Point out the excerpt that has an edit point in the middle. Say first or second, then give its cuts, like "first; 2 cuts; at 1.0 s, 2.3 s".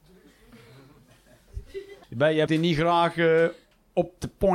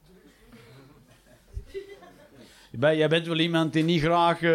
first; 2 cuts; at 2.0 s, 2.5 s